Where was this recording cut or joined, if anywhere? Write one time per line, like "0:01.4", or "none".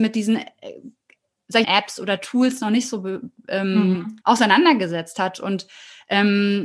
0:01.6
0:04.2